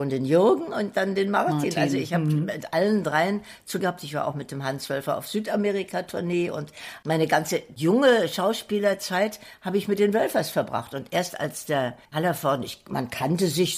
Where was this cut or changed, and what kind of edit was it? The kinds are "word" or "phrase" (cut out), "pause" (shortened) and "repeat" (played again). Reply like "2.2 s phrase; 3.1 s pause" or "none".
3.8 s word; 12.0 s pause